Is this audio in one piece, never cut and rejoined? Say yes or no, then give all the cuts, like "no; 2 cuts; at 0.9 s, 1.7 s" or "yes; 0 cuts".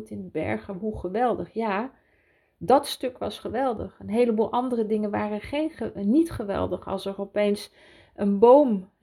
yes; 0 cuts